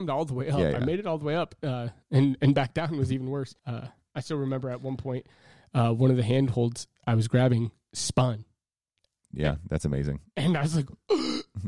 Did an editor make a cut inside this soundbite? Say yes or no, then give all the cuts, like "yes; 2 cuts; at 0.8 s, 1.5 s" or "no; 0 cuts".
yes; 1 cut; at 3.6 s